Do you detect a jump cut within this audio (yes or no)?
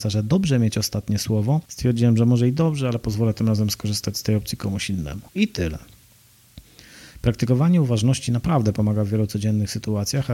yes